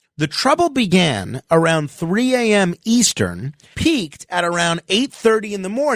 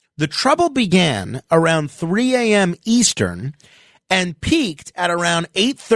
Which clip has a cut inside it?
first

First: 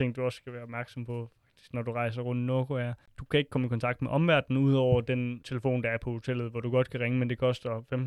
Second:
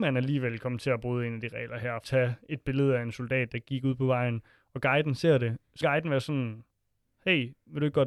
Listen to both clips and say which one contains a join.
second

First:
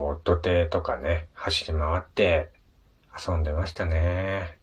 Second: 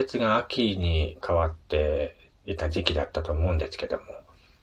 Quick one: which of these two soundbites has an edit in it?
second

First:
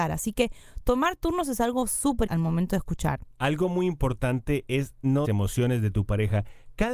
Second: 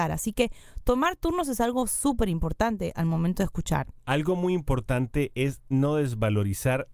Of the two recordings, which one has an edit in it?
first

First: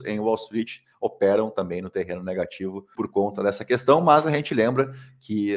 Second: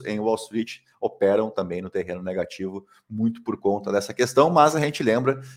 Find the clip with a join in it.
first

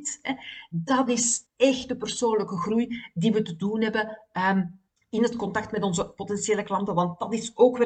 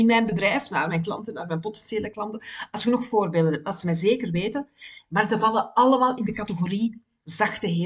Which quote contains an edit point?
first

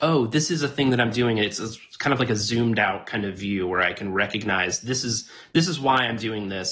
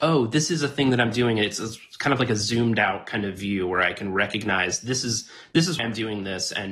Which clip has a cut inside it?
second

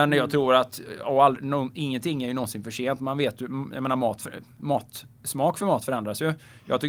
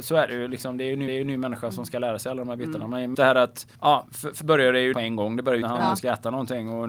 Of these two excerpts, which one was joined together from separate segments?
second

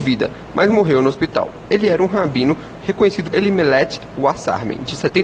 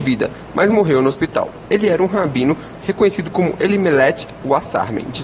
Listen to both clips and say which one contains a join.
first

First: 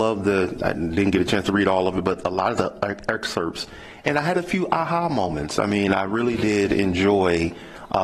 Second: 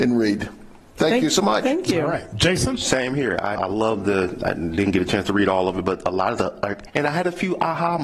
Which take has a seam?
second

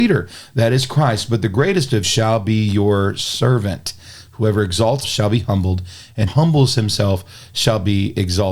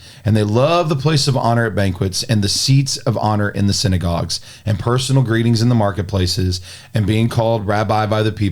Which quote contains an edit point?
first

